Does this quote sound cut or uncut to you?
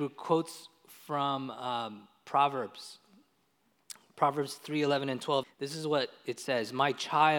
cut